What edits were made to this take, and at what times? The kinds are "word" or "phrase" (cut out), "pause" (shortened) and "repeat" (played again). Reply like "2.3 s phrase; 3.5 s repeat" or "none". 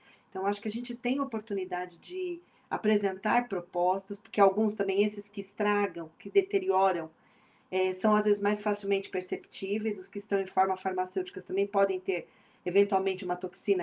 none